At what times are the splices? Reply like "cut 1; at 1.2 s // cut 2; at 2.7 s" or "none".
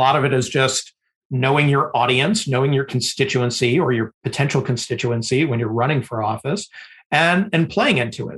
none